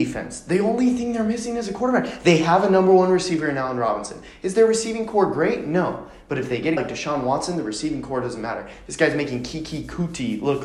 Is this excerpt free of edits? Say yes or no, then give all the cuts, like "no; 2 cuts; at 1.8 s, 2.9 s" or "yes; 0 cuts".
no; 1 cut; at 6.8 s